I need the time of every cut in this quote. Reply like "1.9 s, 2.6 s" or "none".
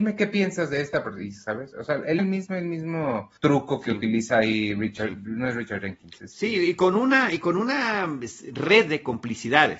2.2 s, 3.4 s, 6.2 s